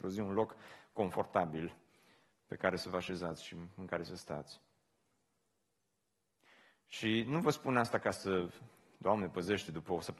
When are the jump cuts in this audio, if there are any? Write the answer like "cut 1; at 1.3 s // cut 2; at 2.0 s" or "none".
none